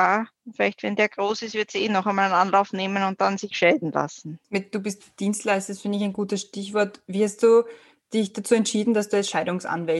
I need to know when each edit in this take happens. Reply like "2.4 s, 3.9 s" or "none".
3.5 s